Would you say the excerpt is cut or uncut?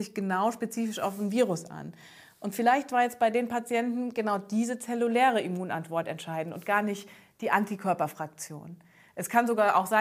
uncut